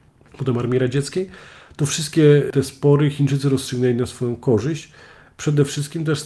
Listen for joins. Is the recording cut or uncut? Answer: uncut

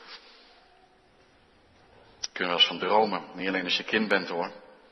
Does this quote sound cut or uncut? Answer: uncut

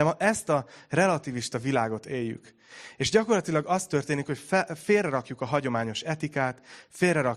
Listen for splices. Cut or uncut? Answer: uncut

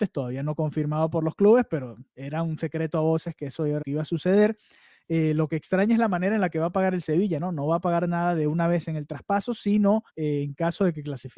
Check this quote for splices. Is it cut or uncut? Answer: cut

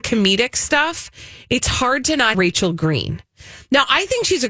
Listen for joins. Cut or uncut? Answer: cut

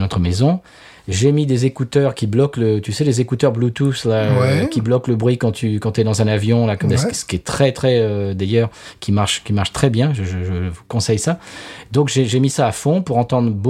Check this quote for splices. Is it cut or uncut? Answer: uncut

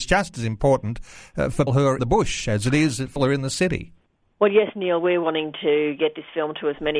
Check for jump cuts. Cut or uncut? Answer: cut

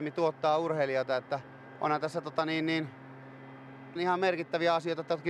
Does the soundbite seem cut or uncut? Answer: cut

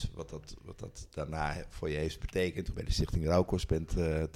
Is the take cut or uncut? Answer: cut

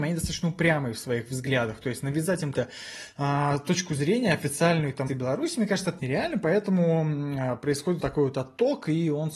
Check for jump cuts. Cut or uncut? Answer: cut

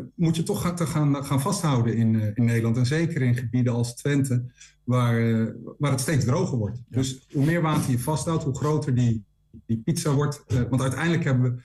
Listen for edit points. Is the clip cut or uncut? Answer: uncut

